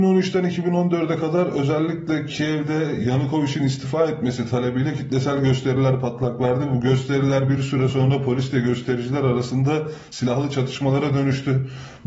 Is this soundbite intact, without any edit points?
yes; 0 cuts

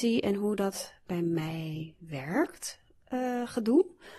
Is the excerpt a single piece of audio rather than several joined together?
yes; 0 cuts

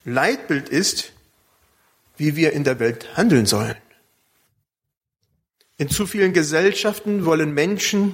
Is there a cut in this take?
no; 0 cuts

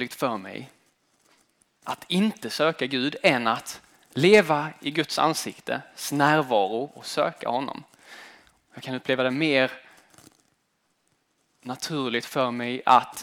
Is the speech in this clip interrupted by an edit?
no; 0 cuts

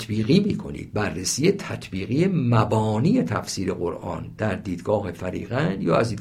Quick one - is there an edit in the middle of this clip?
no; 0 cuts

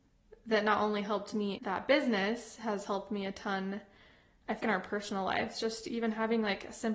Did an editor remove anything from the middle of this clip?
yes; 2 cuts; at 1.6 s, 4.6 s

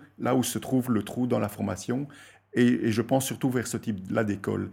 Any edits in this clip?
no; 0 cuts

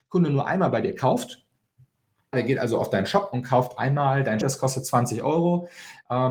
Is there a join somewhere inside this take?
yes; 2 cuts; at 2.3 s, 4.4 s

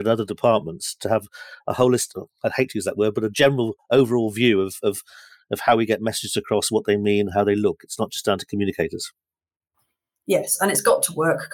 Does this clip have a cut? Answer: no; 0 cuts

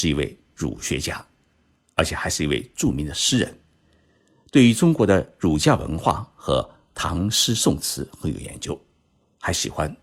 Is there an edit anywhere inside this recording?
no; 0 cuts

